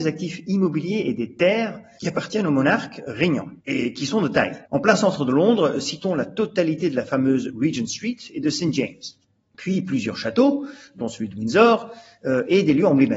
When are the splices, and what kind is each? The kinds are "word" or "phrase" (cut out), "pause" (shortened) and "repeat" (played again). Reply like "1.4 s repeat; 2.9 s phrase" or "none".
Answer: 3.6 s pause; 4.7 s pause